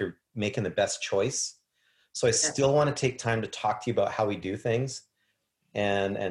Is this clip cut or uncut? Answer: uncut